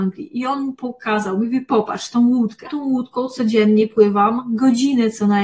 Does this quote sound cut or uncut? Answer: cut